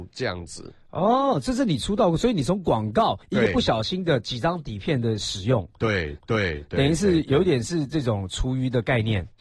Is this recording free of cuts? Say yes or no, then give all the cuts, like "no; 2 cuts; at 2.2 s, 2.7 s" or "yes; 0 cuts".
no; 2 cuts; at 3.2 s, 6.2 s